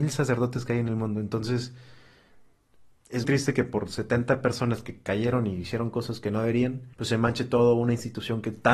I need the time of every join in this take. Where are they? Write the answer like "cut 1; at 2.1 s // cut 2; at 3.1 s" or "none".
cut 1; at 3.2 s // cut 2; at 6.9 s